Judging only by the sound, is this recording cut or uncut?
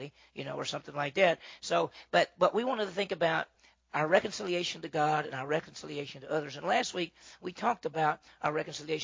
uncut